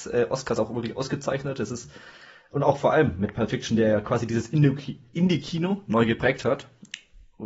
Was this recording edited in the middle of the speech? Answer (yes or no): no